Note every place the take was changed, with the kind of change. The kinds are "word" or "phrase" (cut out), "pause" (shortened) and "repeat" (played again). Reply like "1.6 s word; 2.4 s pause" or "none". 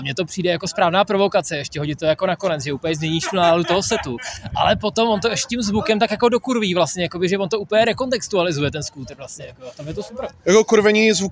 none